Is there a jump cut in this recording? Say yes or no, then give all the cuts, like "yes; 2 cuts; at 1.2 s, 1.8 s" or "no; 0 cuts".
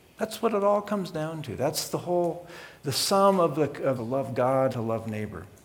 yes; 3 cuts; at 2.8 s, 4.0 s, 4.7 s